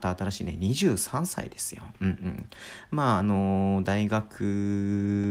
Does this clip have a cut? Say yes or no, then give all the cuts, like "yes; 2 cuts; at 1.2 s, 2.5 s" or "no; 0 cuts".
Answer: no; 0 cuts